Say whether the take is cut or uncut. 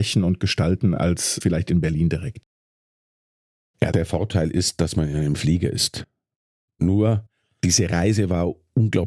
uncut